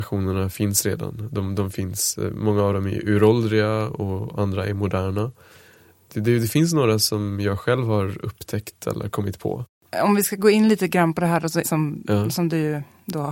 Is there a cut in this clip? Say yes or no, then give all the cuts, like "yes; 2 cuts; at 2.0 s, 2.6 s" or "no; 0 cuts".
yes; 1 cut; at 11.6 s